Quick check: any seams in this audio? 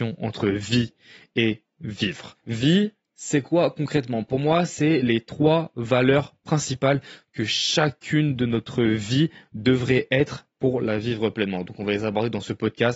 no; 0 cuts

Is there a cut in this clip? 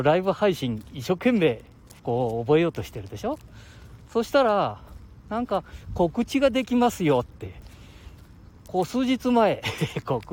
yes; 1 cut; at 2.0 s

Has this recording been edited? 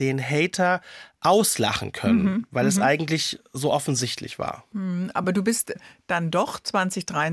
no; 0 cuts

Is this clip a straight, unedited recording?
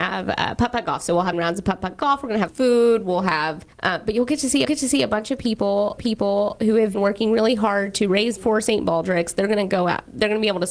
no; 7 cuts; at 1.3 s, 2.5 s, 3.7 s, 4.6 s, 6.0 s, 6.9 s, 8.4 s

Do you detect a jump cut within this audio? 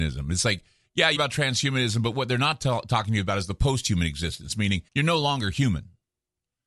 yes; 2 cuts; at 1.2 s, 4.9 s

